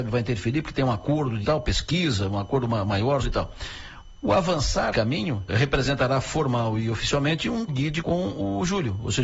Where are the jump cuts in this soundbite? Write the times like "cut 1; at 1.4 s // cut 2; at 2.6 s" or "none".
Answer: cut 1; at 1.4 s // cut 2; at 3.2 s // cut 3; at 4.9 s // cut 4; at 5.5 s // cut 5; at 7.7 s // cut 6; at 8.0 s